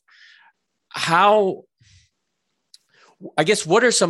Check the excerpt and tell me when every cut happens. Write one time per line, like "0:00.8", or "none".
none